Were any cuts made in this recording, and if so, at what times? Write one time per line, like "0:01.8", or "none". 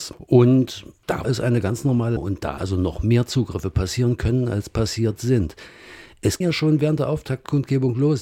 0:01.2
0:02.2
0:02.6
0:06.4